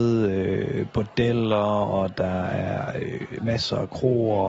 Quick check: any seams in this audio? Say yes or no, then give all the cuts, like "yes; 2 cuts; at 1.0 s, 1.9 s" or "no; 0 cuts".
no; 0 cuts